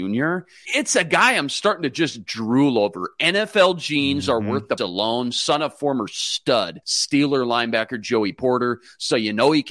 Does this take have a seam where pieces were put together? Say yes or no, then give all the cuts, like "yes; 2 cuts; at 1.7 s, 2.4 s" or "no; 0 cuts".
yes; 2 cuts; at 4.8 s, 6.8 s